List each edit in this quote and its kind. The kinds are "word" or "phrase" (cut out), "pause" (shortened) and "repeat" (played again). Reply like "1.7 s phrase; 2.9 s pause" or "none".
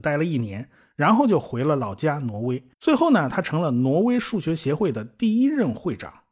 2.7 s pause

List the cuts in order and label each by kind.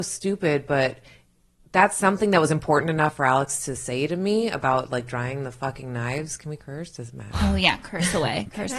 none

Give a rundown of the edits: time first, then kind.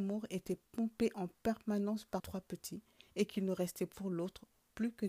2.2 s word

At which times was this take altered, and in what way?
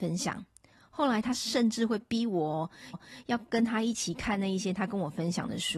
2.9 s repeat

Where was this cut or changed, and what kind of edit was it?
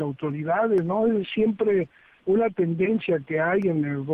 none

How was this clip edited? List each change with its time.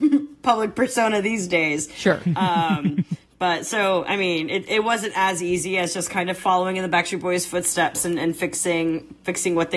none

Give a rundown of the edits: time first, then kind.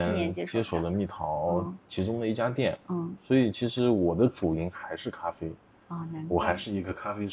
none

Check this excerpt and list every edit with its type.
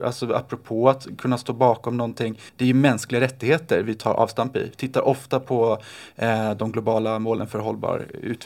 2.5 s pause

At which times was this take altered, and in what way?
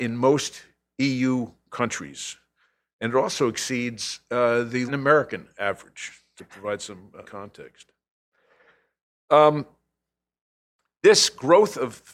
4.9 s word; 6.4 s word; 7.2 s word

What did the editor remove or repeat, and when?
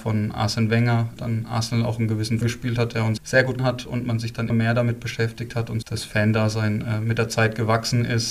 1.2 s word; 2.4 s word; 3.2 s word; 3.6 s word; 4.5 s word; 5.8 s word

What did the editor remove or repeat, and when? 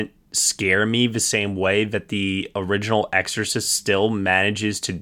none

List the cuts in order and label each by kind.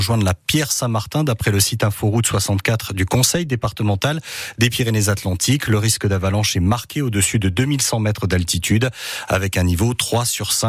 none

